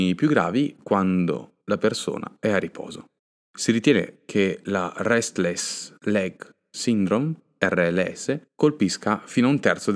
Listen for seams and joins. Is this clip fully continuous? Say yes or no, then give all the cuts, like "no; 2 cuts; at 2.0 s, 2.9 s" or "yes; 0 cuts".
no; 4 cuts; at 1.6 s, 3.2 s, 6.0 s, 8.5 s